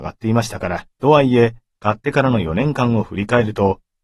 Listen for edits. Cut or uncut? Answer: cut